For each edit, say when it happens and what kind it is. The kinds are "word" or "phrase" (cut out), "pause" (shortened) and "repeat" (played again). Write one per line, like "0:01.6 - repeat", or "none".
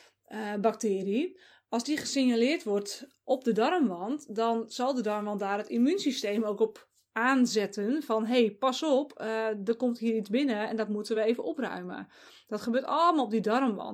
none